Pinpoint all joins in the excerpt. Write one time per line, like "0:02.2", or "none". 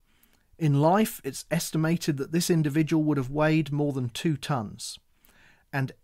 none